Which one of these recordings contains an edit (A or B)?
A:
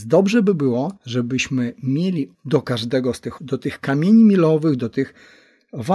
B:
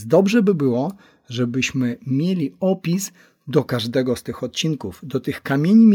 A